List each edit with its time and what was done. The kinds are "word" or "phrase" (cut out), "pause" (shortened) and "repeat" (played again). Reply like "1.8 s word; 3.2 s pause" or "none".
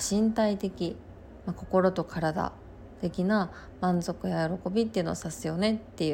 none